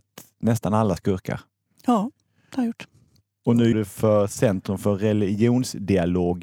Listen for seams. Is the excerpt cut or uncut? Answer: cut